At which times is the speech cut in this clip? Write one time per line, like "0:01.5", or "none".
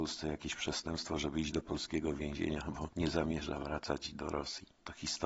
none